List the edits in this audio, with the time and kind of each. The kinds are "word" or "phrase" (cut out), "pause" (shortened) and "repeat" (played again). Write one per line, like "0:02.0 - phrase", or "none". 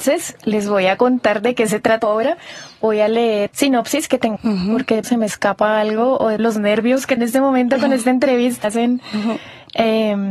0:02.0 - word
0:03.5 - word
0:04.4 - word
0:05.0 - word
0:06.4 - word
0:07.2 - word
0:08.6 - word